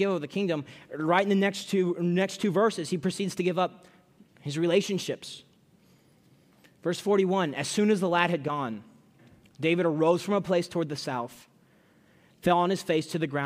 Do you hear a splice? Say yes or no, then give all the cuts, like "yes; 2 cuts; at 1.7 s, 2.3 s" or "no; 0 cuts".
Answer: no; 0 cuts